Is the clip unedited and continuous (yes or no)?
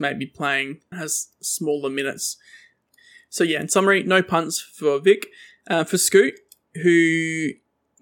no